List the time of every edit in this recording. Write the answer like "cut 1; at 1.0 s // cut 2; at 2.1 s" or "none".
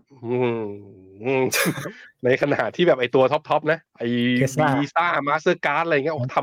cut 1; at 3.9 s